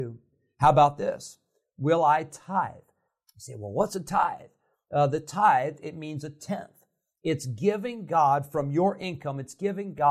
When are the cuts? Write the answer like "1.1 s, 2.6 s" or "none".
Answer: none